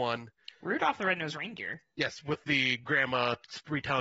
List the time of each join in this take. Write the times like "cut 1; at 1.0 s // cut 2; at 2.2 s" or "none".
none